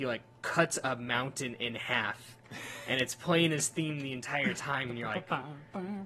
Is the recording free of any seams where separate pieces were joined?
yes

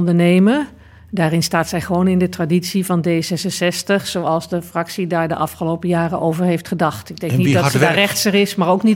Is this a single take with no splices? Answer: yes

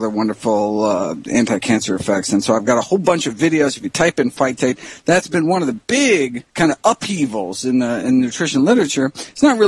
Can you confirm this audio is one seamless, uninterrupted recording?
no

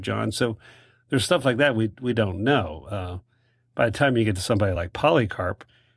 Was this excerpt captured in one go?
yes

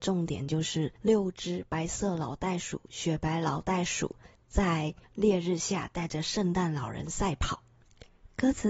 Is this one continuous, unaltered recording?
no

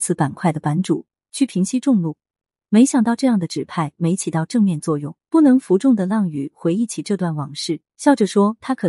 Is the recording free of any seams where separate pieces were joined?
no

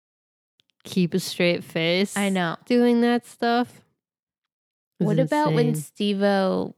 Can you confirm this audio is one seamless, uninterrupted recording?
yes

